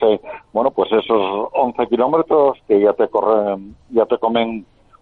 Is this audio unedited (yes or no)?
yes